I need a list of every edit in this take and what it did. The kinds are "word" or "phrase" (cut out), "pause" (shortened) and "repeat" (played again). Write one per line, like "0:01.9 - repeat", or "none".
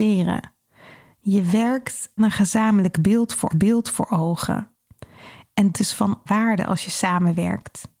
0:02.2 - word
0:03.5 - repeat
0:05.7 - word
0:06.3 - word